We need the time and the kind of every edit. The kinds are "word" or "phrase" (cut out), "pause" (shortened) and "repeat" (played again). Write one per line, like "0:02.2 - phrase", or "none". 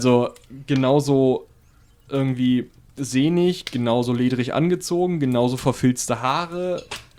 none